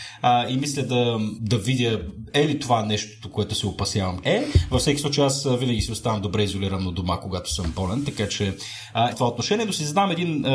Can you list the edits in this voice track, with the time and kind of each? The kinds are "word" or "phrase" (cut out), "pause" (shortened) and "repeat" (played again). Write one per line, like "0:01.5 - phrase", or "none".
0:01.4 - word
0:03.3 - word
0:04.2 - word
0:09.1 - phrase